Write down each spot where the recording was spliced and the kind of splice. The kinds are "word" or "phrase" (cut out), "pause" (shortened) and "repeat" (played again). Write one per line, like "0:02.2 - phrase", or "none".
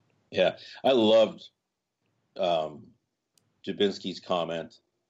none